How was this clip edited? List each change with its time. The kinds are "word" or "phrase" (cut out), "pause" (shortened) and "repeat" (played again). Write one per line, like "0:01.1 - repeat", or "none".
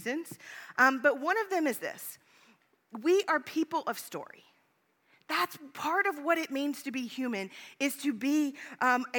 none